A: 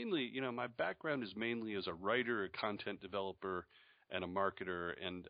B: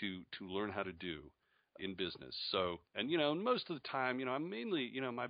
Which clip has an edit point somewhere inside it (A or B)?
B